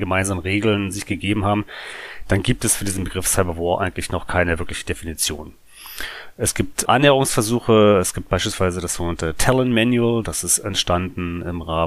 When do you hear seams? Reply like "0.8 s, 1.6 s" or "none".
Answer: 6.9 s